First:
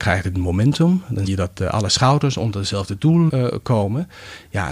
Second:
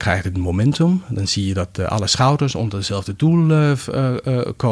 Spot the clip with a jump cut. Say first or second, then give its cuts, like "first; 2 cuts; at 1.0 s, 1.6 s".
first; 2 cuts; at 1.3 s, 3.3 s